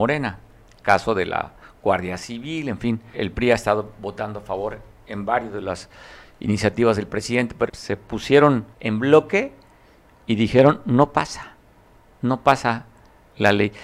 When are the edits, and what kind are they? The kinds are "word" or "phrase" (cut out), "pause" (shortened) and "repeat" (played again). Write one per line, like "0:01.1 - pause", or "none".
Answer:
0:03.1 - word
0:07.7 - phrase
0:08.7 - pause